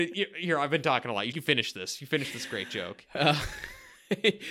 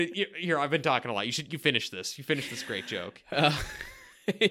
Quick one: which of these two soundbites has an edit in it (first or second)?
first